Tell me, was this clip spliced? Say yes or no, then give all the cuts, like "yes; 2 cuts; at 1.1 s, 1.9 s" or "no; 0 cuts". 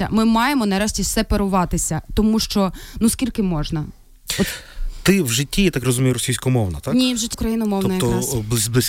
yes; 1 cut; at 7.3 s